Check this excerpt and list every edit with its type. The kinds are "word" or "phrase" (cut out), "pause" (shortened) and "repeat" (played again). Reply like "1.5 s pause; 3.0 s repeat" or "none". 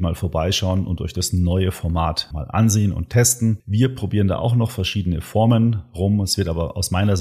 2.3 s word